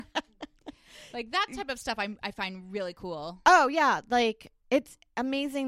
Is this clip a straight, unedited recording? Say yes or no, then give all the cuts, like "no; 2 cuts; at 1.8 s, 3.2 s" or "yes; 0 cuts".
yes; 0 cuts